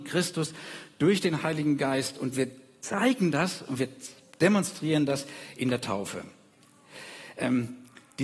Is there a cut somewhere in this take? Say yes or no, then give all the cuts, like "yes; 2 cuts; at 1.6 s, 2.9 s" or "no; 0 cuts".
no; 0 cuts